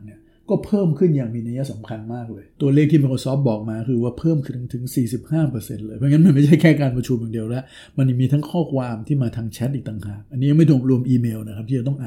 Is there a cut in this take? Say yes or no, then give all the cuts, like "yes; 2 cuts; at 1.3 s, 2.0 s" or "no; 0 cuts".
yes; 1 cut; at 2.5 s